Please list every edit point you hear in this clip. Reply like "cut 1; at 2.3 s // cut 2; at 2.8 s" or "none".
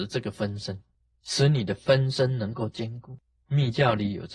none